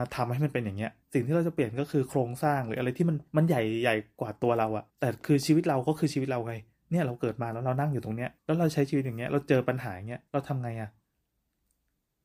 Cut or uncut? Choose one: cut